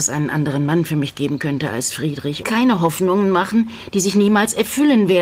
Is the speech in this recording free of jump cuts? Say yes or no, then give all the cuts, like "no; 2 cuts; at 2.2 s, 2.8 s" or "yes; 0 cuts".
no; 1 cut; at 2.4 s